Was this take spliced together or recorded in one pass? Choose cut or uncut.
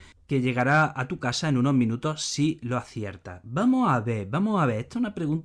uncut